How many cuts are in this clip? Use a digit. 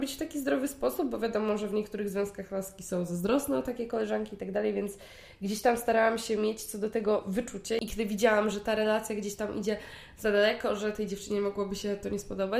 0